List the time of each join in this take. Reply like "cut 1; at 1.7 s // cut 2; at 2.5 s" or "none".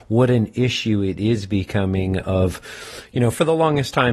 none

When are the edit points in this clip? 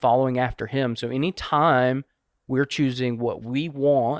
none

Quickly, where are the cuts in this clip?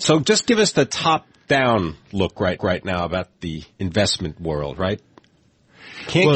cut 1; at 2.6 s // cut 2; at 3.7 s

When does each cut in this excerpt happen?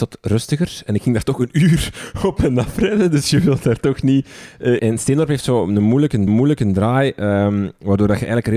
cut 1; at 4.8 s // cut 2; at 6.3 s

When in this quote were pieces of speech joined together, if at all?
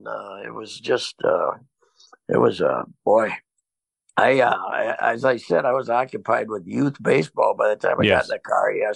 none

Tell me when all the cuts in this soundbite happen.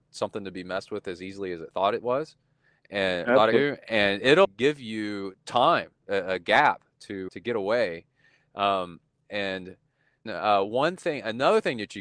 cut 1; at 3.5 s // cut 2; at 4.4 s // cut 3; at 7.3 s // cut 4; at 10.3 s

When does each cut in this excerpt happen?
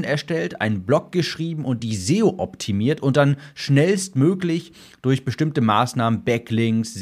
none

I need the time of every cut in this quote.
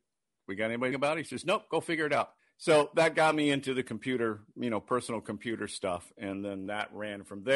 cut 1; at 0.9 s // cut 2; at 2.4 s

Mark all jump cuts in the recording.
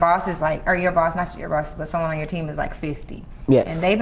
none

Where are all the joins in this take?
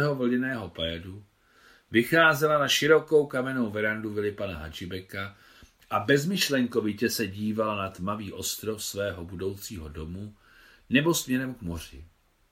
none

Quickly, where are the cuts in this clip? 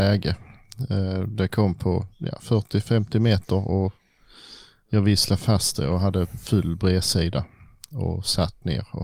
none

